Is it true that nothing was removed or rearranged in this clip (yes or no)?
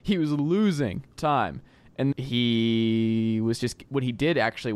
no